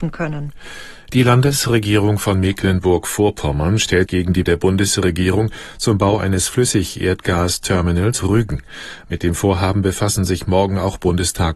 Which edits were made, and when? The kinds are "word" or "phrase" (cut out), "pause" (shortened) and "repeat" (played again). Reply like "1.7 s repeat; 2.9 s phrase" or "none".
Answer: 4.1 s word; 4.5 s word; 8.2 s word